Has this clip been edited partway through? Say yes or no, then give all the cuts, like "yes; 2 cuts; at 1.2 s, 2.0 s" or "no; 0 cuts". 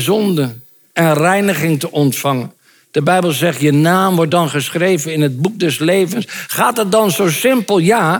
no; 0 cuts